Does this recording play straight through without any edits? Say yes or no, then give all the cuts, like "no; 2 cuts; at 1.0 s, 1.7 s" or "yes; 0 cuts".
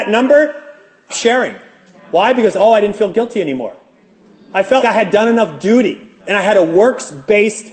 no; 3 cuts; at 1.1 s, 4.8 s, 6.2 s